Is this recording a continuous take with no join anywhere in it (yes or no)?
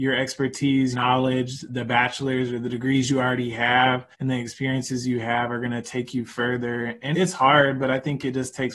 no